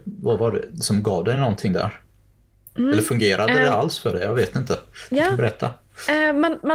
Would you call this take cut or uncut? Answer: uncut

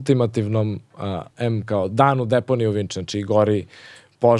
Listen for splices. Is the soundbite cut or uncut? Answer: cut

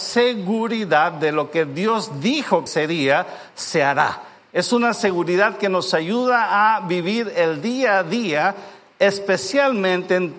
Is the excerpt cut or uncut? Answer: cut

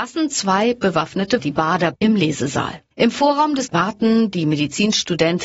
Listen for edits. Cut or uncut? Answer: cut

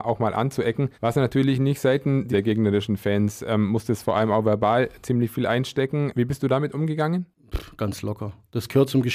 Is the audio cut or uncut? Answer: cut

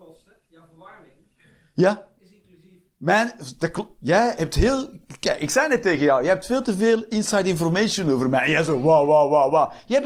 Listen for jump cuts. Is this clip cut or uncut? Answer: uncut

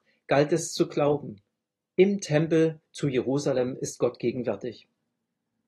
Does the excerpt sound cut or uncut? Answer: uncut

